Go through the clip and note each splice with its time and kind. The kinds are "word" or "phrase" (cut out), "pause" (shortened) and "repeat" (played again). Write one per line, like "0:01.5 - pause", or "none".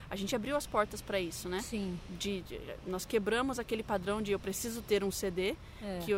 none